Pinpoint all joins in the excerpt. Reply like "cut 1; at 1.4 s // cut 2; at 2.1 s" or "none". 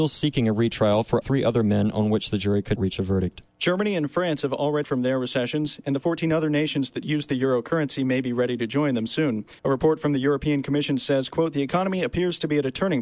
cut 1; at 1.2 s // cut 2; at 2.8 s // cut 3; at 3.5 s // cut 4; at 4.8 s // cut 5; at 9.6 s